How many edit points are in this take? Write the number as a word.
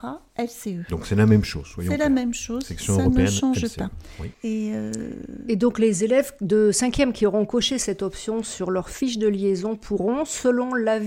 one